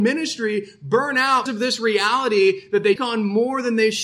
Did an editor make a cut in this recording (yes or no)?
yes